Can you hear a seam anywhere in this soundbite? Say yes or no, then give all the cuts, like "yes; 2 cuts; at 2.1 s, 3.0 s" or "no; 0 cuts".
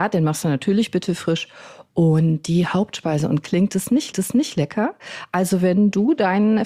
yes; 1 cut; at 4.1 s